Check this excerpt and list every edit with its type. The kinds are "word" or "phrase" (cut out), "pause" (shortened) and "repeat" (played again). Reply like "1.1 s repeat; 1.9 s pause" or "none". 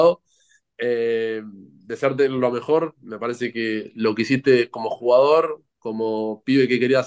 none